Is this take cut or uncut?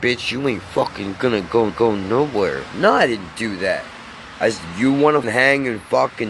cut